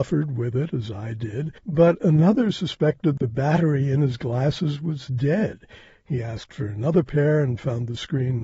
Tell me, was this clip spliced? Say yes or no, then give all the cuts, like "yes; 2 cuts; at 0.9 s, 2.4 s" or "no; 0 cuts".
yes; 2 cuts; at 1.6 s, 3.2 s